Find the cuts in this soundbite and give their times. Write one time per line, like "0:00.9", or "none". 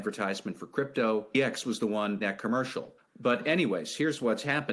0:02.2
0:03.0